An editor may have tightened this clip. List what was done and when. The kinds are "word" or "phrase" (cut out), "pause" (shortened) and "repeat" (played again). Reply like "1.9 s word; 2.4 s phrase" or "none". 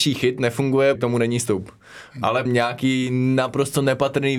1.0 s word; 2.5 s word